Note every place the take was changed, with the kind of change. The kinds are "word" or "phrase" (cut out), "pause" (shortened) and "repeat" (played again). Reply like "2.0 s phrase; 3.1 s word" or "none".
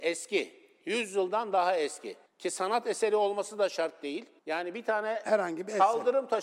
2.3 s pause; 4.4 s pause